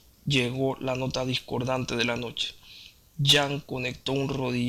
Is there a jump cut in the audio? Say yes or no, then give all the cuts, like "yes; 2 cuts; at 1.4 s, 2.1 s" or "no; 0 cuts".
no; 0 cuts